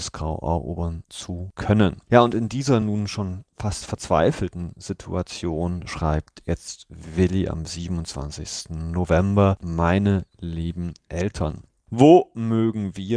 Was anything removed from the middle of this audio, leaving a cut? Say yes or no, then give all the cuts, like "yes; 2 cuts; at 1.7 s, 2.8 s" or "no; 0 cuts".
no; 0 cuts